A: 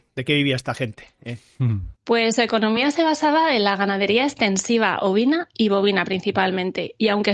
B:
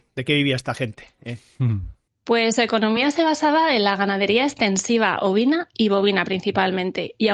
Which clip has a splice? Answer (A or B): A